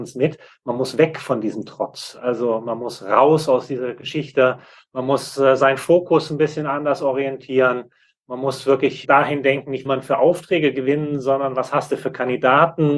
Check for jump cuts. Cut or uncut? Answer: cut